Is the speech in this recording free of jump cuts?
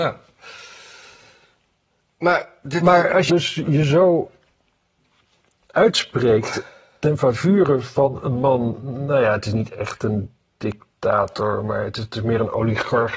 no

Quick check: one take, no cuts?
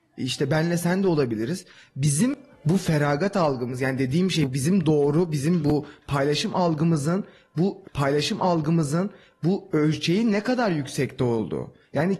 no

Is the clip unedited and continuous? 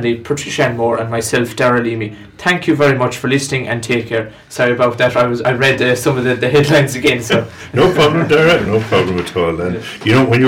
yes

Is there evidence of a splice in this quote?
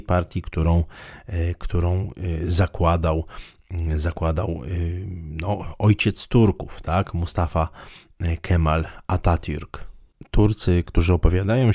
no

